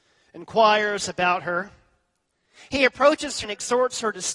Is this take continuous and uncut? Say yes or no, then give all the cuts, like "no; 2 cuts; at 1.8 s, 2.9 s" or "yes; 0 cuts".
no; 1 cut; at 3.4 s